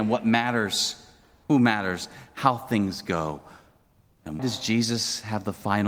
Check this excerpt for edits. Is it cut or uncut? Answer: cut